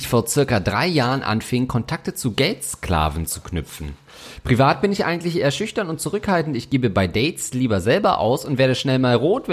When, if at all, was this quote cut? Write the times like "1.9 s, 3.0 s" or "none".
none